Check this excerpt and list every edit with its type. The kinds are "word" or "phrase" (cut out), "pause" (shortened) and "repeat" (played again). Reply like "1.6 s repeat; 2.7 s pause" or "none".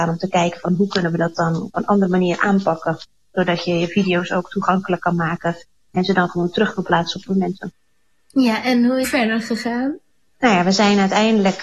7.3 s phrase; 9.0 s phrase